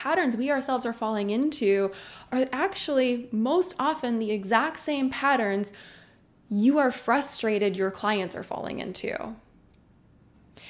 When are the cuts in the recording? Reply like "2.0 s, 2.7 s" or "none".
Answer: none